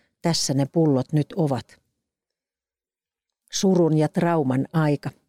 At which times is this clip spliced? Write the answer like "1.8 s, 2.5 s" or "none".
none